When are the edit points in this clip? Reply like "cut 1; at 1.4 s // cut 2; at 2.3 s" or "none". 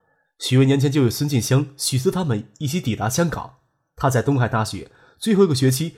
none